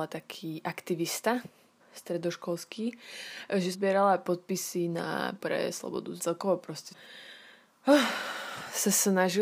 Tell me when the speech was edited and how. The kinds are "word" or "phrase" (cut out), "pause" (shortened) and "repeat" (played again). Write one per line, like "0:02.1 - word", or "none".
0:01.8 - word
0:03.7 - word
0:04.2 - word
0:05.4 - word
0:06.2 - phrase
0:06.9 - word